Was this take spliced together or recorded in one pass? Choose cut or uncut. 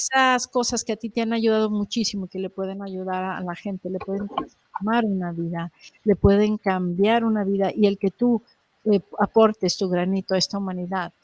uncut